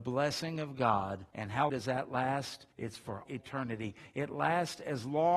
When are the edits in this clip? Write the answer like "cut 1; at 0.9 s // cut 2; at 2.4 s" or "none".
cut 1; at 1.3 s // cut 2; at 1.7 s // cut 3; at 2.7 s // cut 4; at 3.3 s